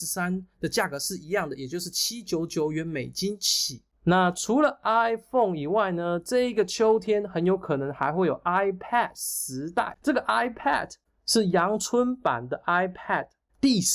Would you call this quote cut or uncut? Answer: uncut